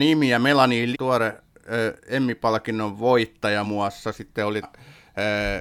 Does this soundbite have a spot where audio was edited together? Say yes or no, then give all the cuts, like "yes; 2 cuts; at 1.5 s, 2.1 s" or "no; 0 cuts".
yes; 3 cuts; at 0.9 s, 3.6 s, 4.6 s